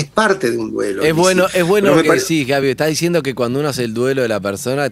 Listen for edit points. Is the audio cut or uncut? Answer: uncut